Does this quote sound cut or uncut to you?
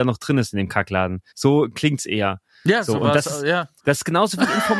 cut